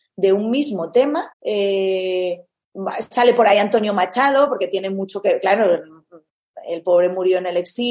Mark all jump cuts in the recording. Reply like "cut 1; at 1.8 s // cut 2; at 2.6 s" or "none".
cut 1; at 1.3 s